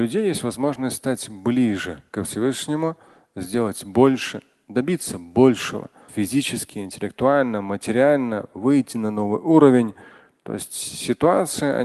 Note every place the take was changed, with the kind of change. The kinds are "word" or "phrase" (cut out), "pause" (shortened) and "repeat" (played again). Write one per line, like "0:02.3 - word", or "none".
0:06.1 - word